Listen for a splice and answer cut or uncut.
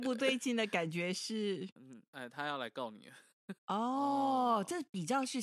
cut